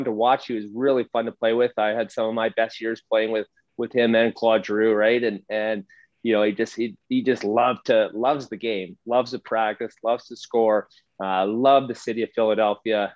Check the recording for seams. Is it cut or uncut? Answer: uncut